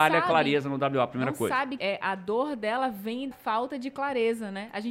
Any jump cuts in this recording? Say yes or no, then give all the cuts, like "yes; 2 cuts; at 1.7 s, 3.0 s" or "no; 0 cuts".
yes; 2 cuts; at 1.8 s, 3.3 s